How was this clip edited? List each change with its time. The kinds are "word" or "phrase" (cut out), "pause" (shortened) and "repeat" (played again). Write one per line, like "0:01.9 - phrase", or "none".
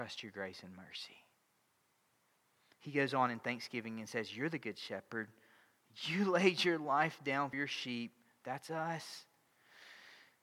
0:07.5 - word